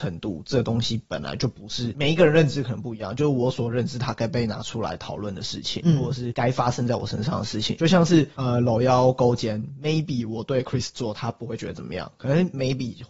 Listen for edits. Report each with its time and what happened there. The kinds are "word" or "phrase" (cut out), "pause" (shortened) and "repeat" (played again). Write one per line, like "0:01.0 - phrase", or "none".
none